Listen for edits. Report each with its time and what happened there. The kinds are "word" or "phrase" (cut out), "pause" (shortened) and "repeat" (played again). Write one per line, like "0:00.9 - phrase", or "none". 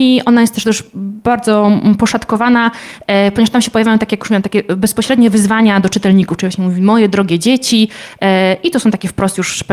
none